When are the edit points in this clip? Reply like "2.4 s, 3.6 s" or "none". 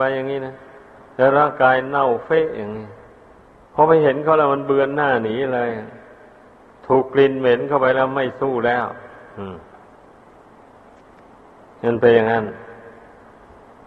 none